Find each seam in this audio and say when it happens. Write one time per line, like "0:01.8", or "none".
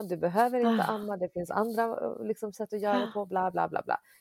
none